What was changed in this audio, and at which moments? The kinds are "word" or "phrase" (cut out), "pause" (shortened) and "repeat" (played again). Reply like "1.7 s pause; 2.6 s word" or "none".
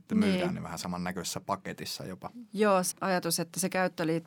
2.9 s word